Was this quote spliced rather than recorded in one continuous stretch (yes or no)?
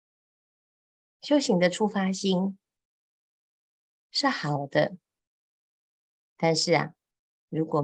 no